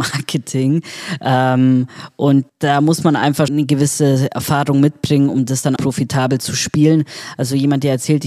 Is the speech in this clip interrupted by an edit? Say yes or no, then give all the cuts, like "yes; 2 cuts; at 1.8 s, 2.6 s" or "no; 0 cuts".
yes; 3 cuts; at 2.5 s, 3.5 s, 5.8 s